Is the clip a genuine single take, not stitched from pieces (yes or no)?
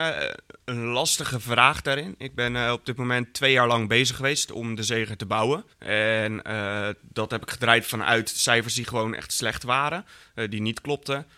no